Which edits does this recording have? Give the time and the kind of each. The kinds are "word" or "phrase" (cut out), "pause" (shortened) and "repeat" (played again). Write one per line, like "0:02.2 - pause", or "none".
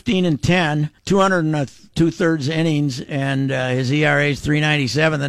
0:01.0 - pause
0:01.9 - word